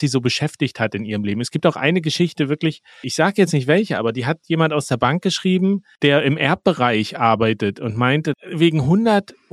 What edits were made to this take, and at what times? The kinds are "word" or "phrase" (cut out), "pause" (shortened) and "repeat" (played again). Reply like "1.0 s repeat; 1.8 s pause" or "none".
none